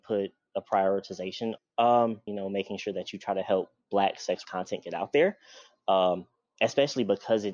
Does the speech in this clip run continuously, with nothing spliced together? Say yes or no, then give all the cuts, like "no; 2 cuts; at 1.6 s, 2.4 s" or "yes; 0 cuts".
no; 4 cuts; at 1.6 s, 2.3 s, 3.8 s, 4.4 s